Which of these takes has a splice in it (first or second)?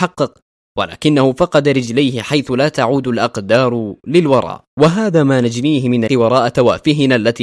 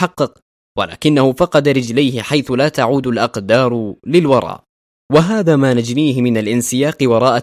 first